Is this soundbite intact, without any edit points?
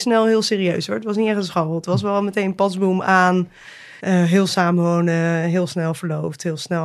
no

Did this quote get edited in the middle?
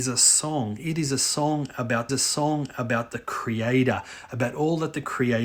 yes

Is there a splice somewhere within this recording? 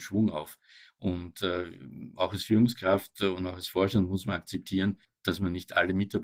yes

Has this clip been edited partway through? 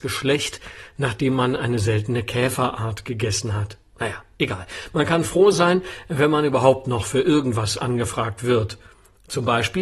no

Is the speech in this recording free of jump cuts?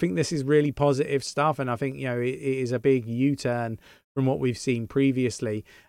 yes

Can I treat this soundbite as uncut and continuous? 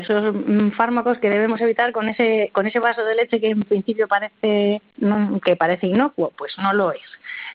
yes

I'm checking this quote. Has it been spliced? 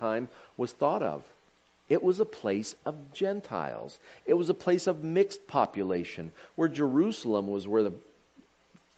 no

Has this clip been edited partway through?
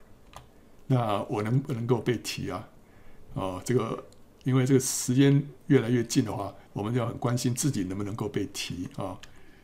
yes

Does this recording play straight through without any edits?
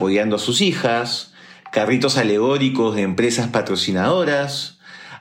yes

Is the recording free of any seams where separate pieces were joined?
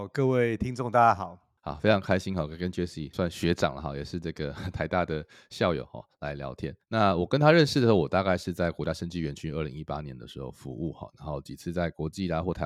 yes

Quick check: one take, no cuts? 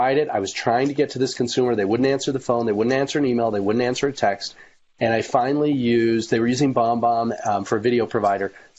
yes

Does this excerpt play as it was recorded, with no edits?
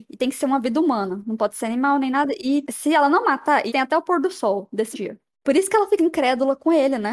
no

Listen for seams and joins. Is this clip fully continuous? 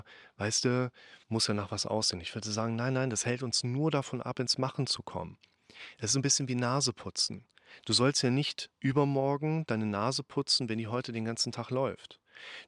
no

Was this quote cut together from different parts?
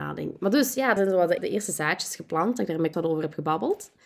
yes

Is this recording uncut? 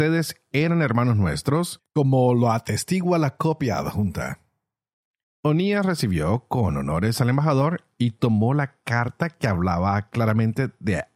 yes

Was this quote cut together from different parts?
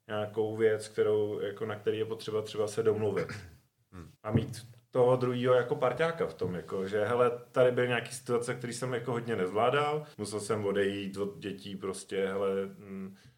yes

